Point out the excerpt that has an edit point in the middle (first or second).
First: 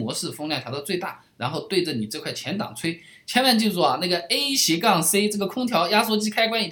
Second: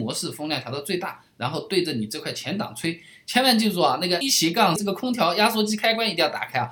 second